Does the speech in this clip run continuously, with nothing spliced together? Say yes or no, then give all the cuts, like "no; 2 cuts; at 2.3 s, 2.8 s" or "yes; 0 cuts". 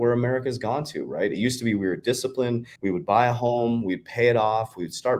no; 1 cut; at 2.8 s